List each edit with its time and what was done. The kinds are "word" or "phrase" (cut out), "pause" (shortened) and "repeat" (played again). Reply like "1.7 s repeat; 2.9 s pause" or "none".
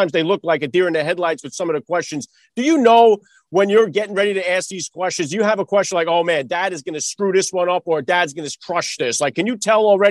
none